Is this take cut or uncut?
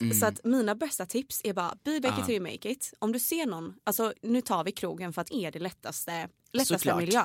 cut